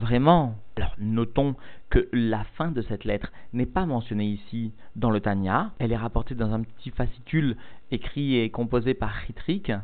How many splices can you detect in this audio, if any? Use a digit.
0